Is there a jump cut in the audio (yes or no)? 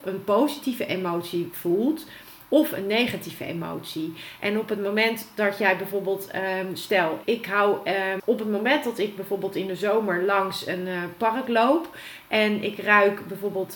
yes